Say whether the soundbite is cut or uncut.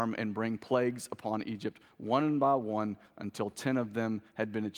uncut